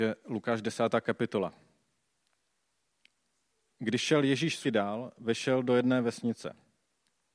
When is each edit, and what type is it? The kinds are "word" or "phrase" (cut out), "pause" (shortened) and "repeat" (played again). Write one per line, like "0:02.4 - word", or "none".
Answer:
0:04.6 - word